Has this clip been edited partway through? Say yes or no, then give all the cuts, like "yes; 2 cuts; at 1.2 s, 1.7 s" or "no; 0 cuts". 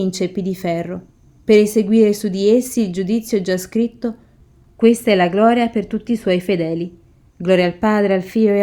no; 0 cuts